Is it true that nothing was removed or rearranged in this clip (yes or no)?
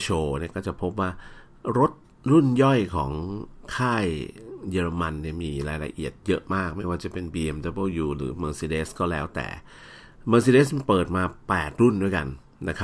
yes